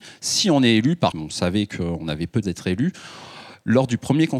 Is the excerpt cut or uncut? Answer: cut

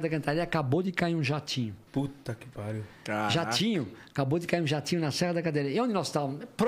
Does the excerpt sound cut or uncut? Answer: cut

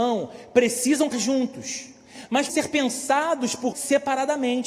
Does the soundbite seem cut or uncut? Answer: cut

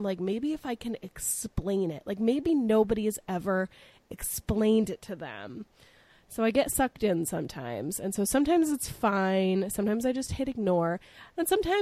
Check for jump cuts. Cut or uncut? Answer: uncut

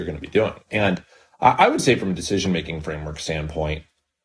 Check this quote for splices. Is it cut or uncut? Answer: uncut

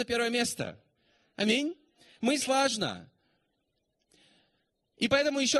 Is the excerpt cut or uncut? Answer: cut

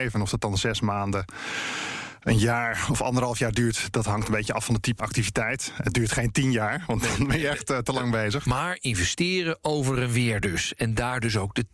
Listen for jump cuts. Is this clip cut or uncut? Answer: cut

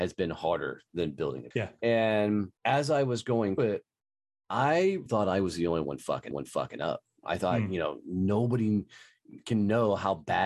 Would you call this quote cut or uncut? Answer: cut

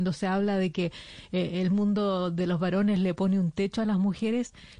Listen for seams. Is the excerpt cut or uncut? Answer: uncut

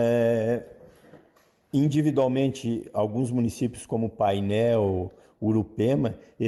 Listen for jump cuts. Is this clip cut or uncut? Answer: uncut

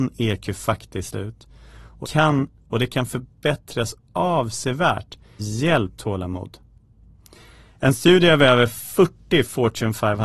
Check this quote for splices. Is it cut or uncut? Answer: cut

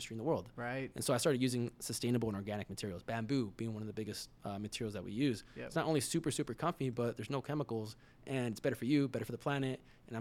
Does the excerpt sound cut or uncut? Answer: uncut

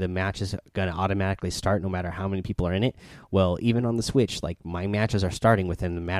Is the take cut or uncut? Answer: uncut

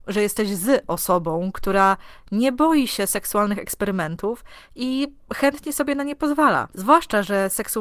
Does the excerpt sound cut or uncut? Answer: uncut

